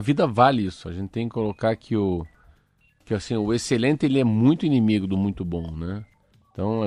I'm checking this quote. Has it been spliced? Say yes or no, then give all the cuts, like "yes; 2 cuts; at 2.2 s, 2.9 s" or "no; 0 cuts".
no; 0 cuts